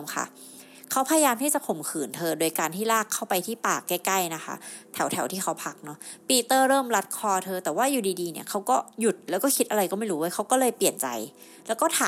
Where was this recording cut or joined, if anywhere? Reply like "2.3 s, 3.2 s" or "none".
8.9 s